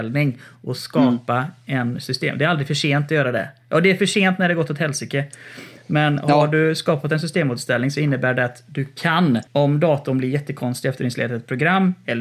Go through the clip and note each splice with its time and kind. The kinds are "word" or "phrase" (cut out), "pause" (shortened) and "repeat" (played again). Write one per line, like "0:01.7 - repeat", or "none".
0:09.5 - pause